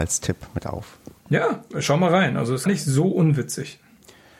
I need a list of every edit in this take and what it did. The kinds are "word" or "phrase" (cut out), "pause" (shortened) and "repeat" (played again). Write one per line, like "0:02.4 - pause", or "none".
0:01.2 - pause
0:02.7 - word